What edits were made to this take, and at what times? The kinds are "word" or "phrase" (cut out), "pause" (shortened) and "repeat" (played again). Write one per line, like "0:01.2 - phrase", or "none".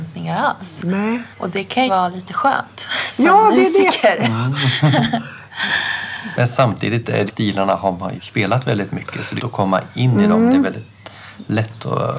0:01.3 - pause
0:01.9 - word
0:07.3 - phrase
0:08.2 - word
0:09.4 - phrase